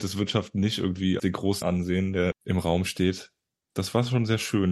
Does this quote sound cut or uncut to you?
cut